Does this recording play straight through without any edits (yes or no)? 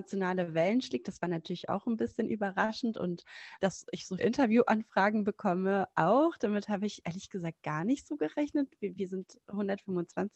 no